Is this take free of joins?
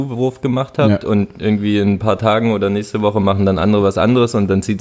yes; 0 cuts

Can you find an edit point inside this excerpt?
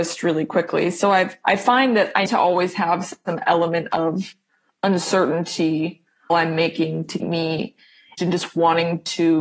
yes; 4 cuts; at 2.3 s, 6.3 s, 7.2 s, 8.2 s

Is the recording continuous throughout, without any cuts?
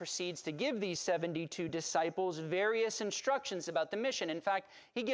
yes; 0 cuts

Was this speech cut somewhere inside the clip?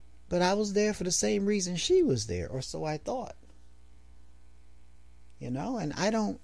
no; 0 cuts

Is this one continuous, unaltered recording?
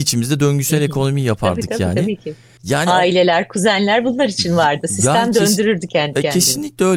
yes; 0 cuts

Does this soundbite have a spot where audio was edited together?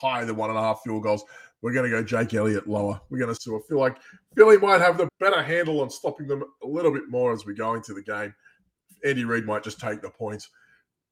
yes; 2 cuts; at 3.4 s, 5.1 s

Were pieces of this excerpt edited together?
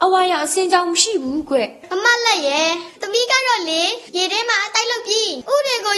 yes; 1 cut; at 4.1 s

